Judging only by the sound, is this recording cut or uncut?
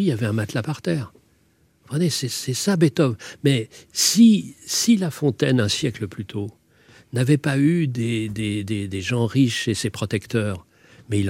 uncut